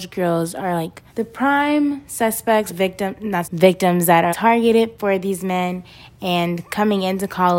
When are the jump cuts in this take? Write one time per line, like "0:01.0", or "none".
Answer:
0:01.1
0:02.7
0:03.4
0:04.3